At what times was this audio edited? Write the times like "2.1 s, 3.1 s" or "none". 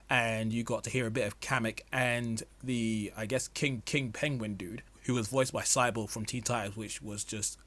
3.8 s, 4.9 s